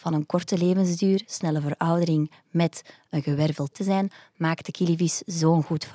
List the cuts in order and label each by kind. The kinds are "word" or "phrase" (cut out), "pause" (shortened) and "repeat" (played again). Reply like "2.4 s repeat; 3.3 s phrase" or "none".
3.7 s word